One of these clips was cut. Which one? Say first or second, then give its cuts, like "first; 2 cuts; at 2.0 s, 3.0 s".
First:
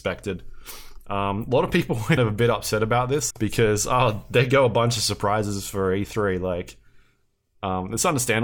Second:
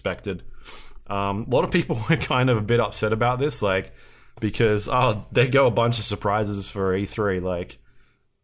first; 2 cuts; at 2.2 s, 3.3 s